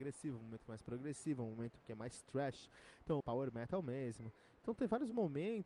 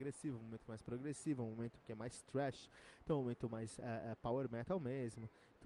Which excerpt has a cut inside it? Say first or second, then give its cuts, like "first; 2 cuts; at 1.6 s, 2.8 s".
first; 1 cut; at 3.2 s